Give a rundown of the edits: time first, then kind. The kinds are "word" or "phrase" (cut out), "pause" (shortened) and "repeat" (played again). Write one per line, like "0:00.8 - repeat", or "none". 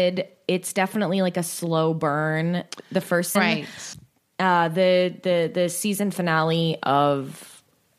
0:03.3 - word